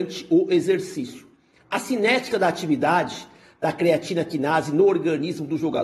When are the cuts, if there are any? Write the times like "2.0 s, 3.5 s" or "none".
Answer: none

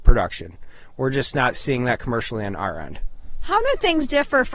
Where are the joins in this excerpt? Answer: none

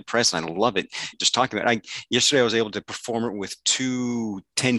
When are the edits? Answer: 1.1 s

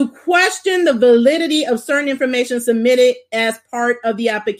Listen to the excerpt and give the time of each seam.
none

